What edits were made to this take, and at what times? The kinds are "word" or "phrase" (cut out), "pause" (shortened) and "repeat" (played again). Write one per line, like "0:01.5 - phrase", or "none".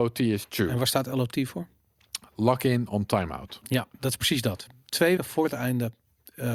0:05.2 - word